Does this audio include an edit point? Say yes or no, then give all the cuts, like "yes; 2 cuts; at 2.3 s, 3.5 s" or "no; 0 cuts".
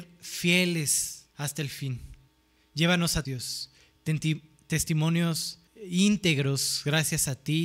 yes; 4 cuts; at 1.3 s, 2.3 s, 3.3 s, 5.7 s